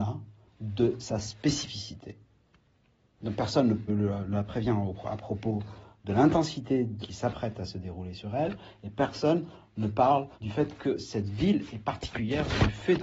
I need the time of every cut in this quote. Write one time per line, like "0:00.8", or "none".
0:03.9
0:07.0
0:10.3

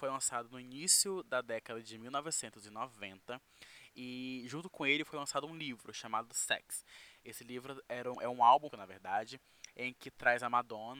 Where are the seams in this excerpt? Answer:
0:08.1
0:08.7

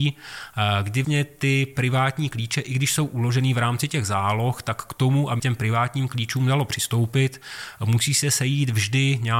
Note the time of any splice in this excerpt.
0:01.0
0:05.4

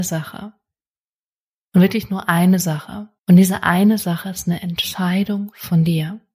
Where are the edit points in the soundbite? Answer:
0:03.2

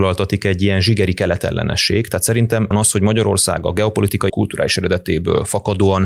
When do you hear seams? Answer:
0:02.7
0:04.3

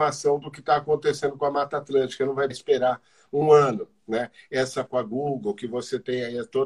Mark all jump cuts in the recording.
0:02.5
0:04.9

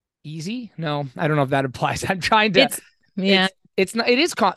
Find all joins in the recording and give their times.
none

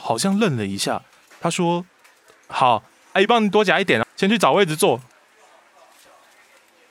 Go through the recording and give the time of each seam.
0:01.9
0:04.0

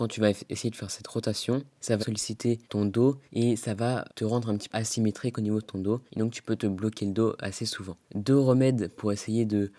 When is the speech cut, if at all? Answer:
0:02.0
0:02.6
0:03.3
0:04.1
0:04.7
0:06.1
0:08.0

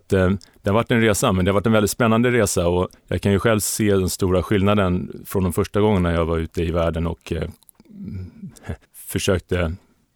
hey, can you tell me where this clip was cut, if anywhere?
0:03.0
0:08.8

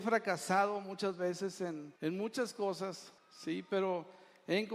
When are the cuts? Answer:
0:02.0
0:03.2

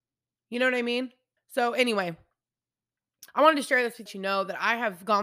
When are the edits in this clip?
0:01.4
0:03.3
0:04.1

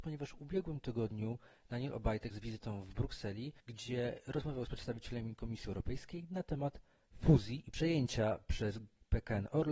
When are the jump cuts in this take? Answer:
0:02.3
0:03.6
0:04.7

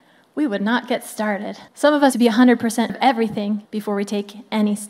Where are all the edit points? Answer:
0:01.7
0:02.1
0:02.9
0:03.6

